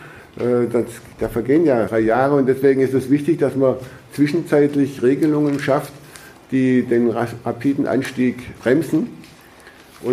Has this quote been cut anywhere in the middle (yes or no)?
yes